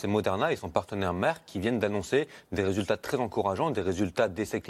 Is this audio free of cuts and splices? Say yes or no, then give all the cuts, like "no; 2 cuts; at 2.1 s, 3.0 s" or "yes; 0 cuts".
yes; 0 cuts